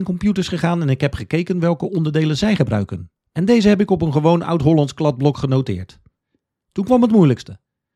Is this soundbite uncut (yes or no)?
yes